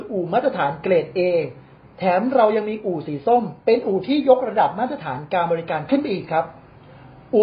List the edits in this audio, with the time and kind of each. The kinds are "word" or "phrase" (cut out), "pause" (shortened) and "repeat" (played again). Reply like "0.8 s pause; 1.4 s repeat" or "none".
3.6 s pause